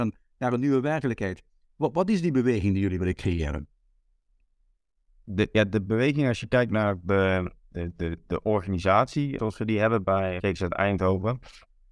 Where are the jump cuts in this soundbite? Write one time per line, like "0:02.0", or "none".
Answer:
none